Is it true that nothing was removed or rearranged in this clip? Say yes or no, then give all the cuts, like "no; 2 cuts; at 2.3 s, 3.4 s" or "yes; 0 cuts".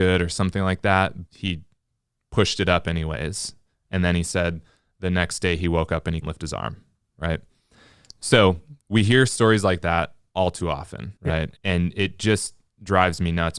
no; 4 cuts; at 1.3 s, 6.2 s, 8.8 s, 11.2 s